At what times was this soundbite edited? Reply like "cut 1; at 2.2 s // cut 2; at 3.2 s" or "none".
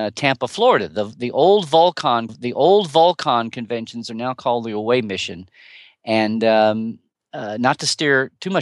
cut 1; at 2.3 s

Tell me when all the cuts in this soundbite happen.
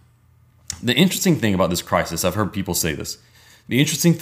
none

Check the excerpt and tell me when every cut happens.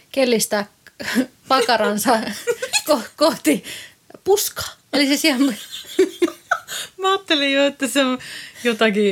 none

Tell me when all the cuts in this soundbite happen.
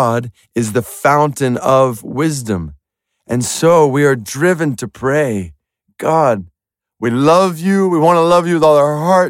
none

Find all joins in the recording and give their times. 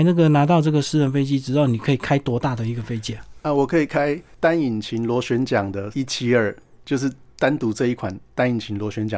cut 1; at 5.9 s

